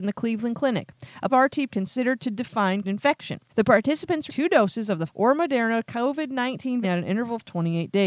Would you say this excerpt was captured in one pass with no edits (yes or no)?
no